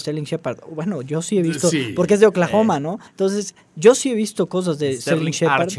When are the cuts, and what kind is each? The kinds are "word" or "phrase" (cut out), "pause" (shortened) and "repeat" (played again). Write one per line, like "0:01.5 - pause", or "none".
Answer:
0:03.1 - pause